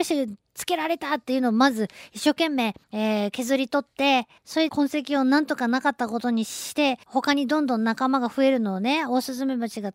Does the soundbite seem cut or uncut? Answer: cut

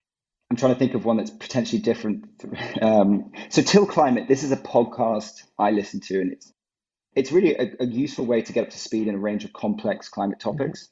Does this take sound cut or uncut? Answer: uncut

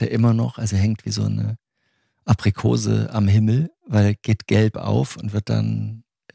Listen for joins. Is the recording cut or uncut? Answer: uncut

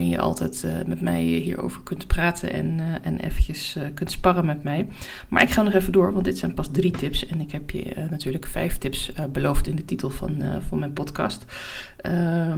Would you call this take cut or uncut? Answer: uncut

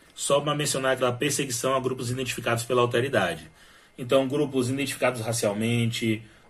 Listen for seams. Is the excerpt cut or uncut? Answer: cut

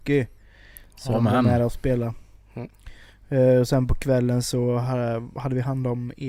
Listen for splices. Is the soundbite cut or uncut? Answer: uncut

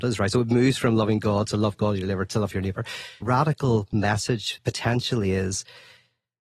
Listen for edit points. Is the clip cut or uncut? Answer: cut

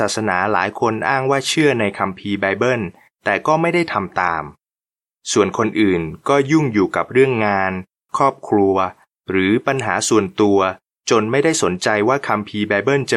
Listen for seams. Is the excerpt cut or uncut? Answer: uncut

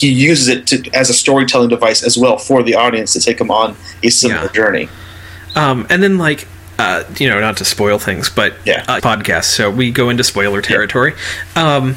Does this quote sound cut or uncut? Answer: cut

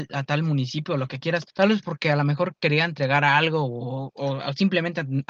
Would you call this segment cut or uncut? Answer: cut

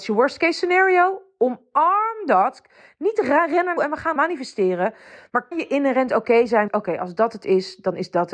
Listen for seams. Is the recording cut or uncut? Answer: cut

